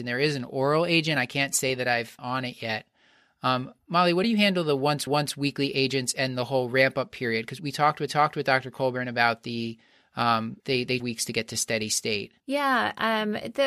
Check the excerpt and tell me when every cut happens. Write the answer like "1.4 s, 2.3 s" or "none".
2.2 s, 4.2 s, 5.1 s, 7.6 s, 8.1 s, 10.6 s, 11.0 s, 12.4 s